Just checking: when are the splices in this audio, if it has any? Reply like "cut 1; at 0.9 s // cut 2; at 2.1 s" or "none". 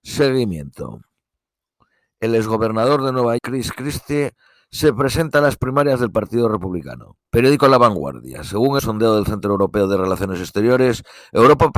cut 1; at 3.4 s // cut 2; at 7.3 s // cut 3; at 8.8 s